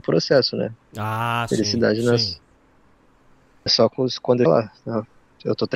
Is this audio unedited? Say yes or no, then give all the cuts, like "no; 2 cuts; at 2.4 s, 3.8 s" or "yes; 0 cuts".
no; 2 cuts; at 3.7 s, 4.5 s